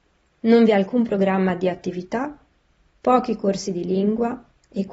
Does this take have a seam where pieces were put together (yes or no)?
no